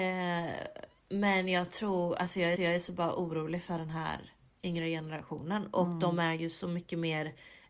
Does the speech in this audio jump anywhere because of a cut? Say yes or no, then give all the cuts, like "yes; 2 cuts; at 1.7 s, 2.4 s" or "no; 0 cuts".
yes; 1 cut; at 2.6 s